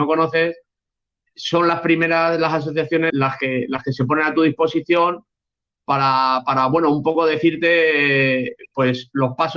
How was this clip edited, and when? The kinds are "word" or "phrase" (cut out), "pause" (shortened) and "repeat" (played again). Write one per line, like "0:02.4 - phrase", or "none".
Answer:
0:03.1 - word